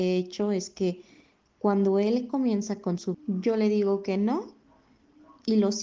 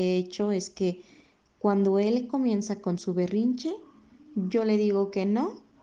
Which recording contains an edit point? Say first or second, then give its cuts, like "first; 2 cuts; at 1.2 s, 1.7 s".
first; 1 cut; at 3.1 s